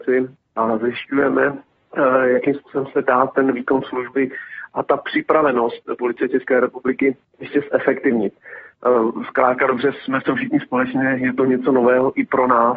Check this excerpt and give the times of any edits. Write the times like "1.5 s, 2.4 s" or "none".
7.3 s